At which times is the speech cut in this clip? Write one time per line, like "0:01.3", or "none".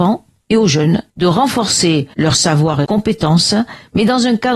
0:01.1
0:02.1
0:02.8